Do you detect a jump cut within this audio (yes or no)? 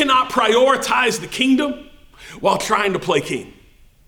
no